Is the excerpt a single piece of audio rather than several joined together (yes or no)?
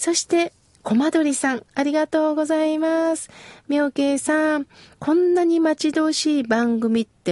yes